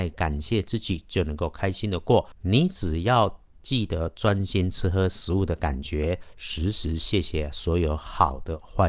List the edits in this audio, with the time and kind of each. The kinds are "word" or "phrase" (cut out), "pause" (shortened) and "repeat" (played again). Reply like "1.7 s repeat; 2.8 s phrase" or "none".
2.3 s pause